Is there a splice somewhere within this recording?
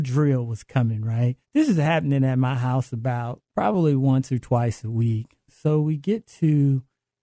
yes; 2 cuts; at 1.4 s, 3.5 s

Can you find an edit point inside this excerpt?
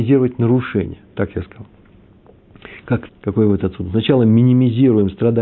yes; 1 cut; at 3.1 s

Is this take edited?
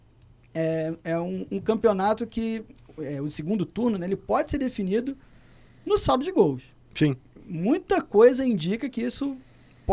no; 0 cuts

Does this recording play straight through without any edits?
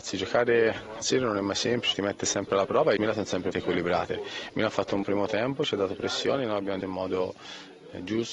no; 6 cuts; at 1.0 s, 1.9 s, 3.0 s, 3.5 s, 5.0 s, 6.8 s

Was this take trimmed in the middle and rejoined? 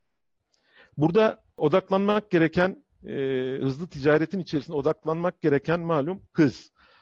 no; 0 cuts

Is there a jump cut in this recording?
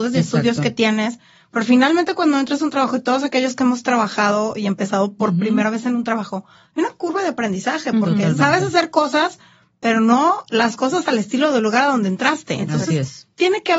no; 0 cuts

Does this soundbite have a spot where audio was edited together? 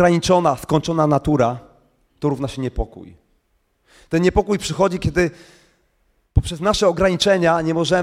no; 0 cuts

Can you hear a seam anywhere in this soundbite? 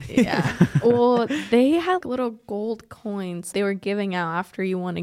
yes; 2 cuts; at 2.0 s, 3.5 s

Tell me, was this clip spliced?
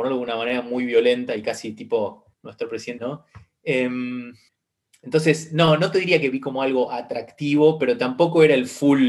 yes; 3 cuts; at 2.3 s, 3.0 s, 4.5 s

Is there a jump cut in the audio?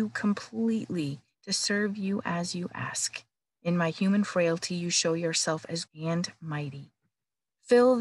yes; 3 cuts; at 1.3 s, 3.3 s, 5.8 s

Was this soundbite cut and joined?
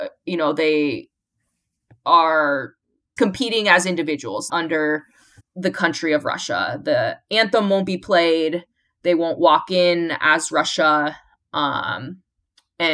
yes; 3 cuts; at 3.2 s, 4.5 s, 5.4 s

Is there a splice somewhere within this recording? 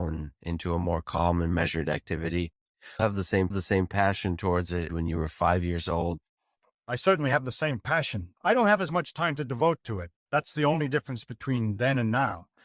yes; 4 cuts; at 3.0 s, 3.5 s, 4.9 s, 8.4 s

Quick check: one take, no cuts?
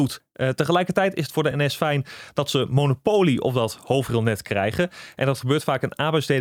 yes; 0 cuts

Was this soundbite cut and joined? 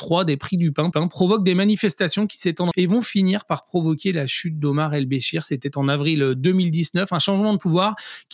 yes; 2 cuts; at 0.9 s, 2.7 s

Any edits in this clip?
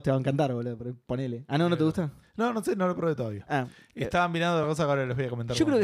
no; 0 cuts

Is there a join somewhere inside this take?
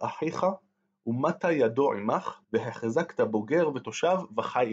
yes; 1 cut; at 2.4 s

